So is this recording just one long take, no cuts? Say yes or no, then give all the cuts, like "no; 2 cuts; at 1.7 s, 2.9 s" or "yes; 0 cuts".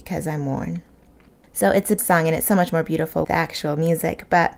no; 2 cuts; at 2.0 s, 3.2 s